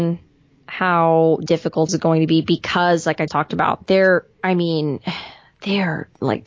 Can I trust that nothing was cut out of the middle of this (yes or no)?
no